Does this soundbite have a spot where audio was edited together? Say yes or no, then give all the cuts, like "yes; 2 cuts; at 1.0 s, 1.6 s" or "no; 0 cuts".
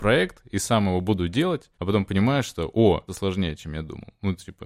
yes; 2 cuts; at 1.7 s, 3.1 s